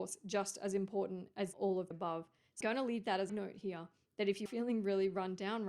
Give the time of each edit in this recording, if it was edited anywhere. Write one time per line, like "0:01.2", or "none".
0:01.5
0:01.9
0:02.6
0:03.3
0:04.5